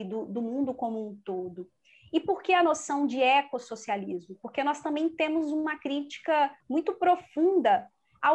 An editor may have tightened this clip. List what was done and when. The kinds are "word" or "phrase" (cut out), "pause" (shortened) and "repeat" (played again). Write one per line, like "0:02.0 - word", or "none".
0:06.6 - pause